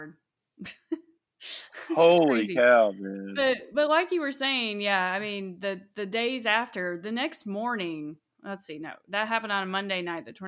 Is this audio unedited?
yes; 0 cuts

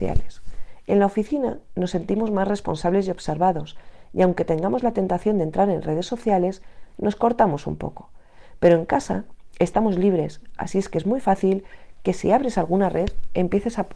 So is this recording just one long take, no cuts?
yes; 0 cuts

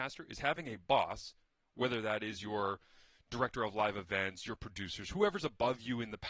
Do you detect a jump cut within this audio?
no; 0 cuts

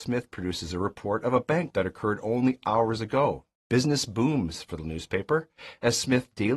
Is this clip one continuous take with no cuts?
no; 3 cuts; at 1.7 s, 3.5 s, 4.8 s

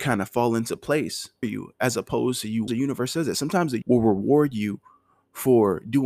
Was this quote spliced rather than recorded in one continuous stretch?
yes; 3 cuts; at 1.4 s, 2.7 s, 3.8 s

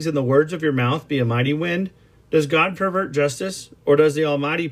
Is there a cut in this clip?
no; 0 cuts

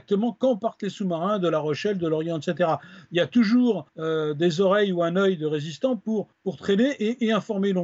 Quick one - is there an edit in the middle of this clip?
yes; 2 cuts; at 3.9 s, 6.3 s

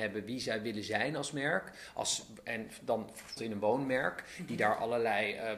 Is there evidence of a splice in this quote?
yes; 1 cut; at 3.4 s

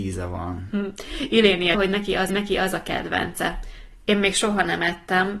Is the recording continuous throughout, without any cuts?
no; 2 cuts; at 1.7 s, 2.3 s

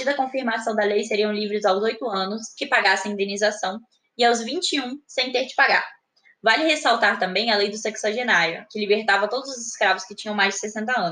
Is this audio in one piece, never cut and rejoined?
no; 1 cut; at 2.6 s

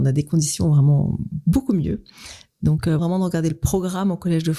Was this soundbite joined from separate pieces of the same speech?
yes; 1 cut; at 3.0 s

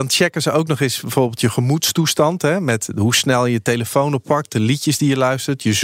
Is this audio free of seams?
yes; 0 cuts

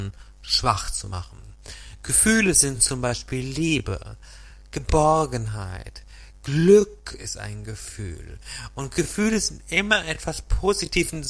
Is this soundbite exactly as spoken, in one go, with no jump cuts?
yes; 0 cuts

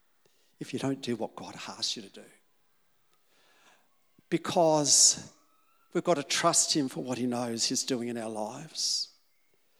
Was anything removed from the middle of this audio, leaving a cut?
no; 0 cuts

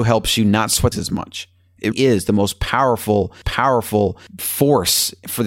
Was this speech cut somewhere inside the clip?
yes; 3 cuts; at 0.9 s, 1.9 s, 3.4 s

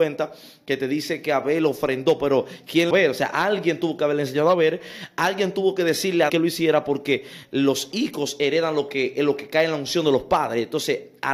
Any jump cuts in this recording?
yes; 2 cuts; at 2.9 s, 6.3 s

